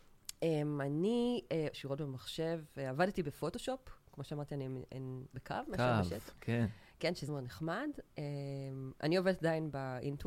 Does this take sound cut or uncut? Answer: cut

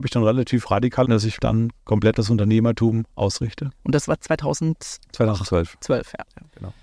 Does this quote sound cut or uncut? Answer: cut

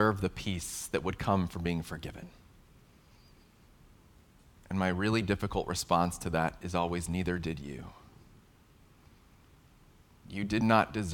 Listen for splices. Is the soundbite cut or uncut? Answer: uncut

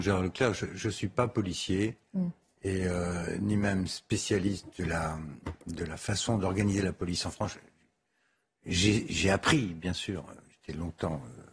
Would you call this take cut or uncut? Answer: uncut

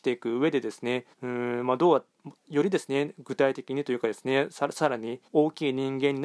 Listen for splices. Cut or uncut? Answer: cut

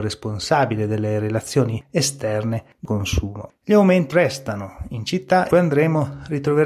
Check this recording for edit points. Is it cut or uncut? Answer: cut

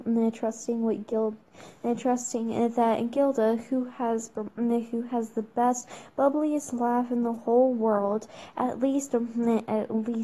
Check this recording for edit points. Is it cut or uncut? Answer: uncut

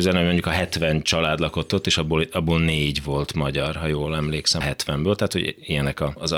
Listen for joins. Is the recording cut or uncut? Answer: cut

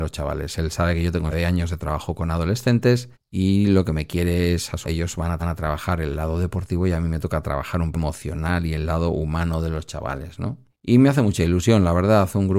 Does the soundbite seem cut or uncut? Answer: cut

